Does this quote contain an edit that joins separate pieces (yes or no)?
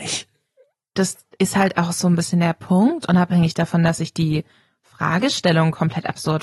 no